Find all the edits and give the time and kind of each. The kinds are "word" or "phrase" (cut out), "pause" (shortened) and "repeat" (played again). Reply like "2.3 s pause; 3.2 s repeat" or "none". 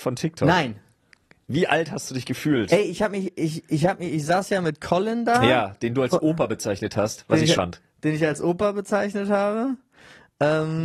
7.5 s phrase